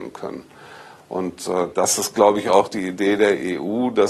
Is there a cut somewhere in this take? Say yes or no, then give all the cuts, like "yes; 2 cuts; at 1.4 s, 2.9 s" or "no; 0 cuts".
no; 0 cuts